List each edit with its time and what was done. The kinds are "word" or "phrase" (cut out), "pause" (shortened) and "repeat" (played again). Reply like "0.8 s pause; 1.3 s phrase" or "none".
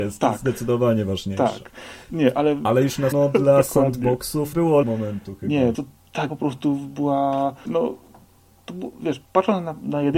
3.1 s word; 4.5 s word; 4.8 s word; 5.7 s word; 6.3 s word; 7.7 s word; 9.2 s pause